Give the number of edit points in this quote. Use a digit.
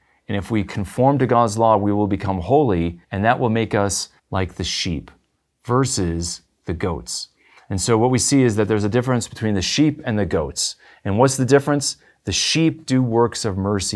2